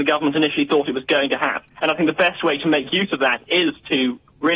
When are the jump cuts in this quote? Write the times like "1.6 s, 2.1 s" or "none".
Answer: 1.7 s

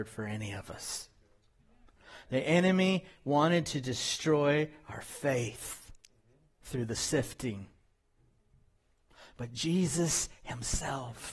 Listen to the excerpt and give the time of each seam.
none

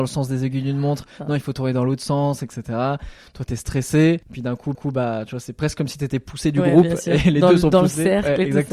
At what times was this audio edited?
4.2 s, 4.7 s

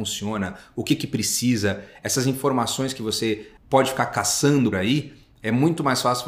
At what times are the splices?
3.6 s, 4.7 s

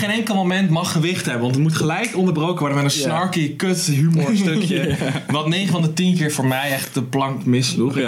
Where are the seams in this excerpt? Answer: none

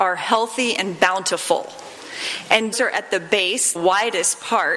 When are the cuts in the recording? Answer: 2.7 s, 3.7 s

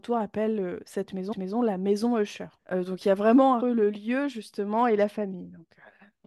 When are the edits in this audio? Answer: 1.3 s, 2.6 s, 3.6 s

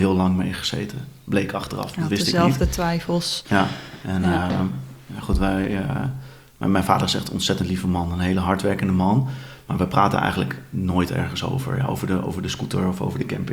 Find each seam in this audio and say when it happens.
none

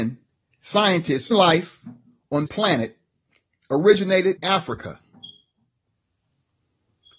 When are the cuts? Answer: 1.3 s, 2.5 s, 4.4 s

